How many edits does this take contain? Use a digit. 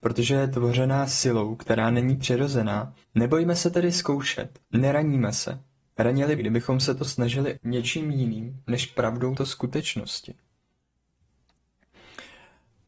5